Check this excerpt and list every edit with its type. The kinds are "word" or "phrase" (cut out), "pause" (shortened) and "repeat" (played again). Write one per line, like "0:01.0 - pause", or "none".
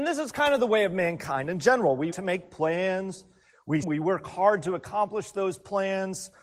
0:02.1 - word
0:03.8 - word